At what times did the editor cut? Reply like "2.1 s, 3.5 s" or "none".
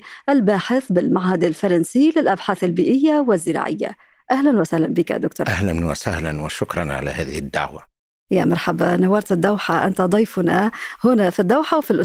5.4 s